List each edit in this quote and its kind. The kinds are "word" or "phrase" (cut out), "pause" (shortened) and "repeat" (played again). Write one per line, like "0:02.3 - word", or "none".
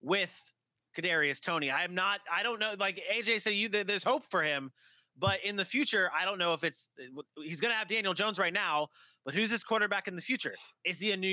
none